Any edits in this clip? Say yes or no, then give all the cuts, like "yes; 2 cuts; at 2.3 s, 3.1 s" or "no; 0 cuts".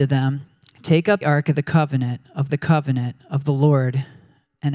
yes; 2 cuts; at 1.2 s, 2.5 s